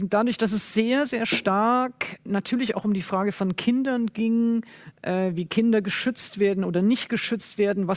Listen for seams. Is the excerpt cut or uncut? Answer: cut